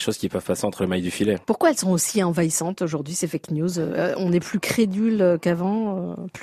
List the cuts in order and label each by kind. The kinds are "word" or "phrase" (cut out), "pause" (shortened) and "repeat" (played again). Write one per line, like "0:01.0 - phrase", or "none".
none

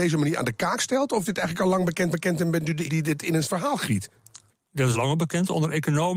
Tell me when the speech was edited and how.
0:01.3 - word
0:02.1 - repeat
0:02.9 - word
0:03.4 - word
0:04.5 - pause
0:04.9 - word

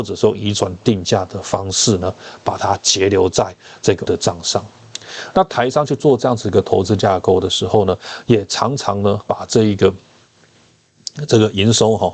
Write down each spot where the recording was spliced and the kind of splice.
0:04.1 - word
0:09.2 - word

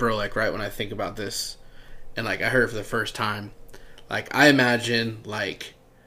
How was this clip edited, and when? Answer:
none

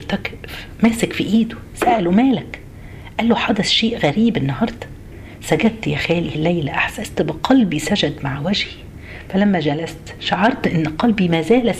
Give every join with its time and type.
0:06.3 - word

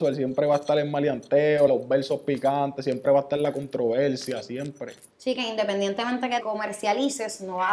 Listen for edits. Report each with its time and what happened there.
0:01.7 - phrase
0:05.1 - pause
0:06.4 - word

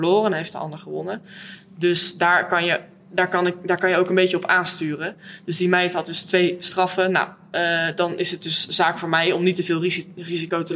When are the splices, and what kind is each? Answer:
none

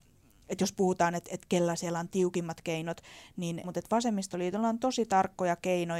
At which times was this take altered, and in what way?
0:03.6 - phrase

